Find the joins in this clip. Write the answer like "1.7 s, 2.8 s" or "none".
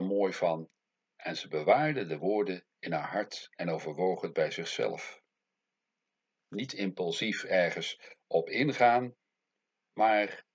none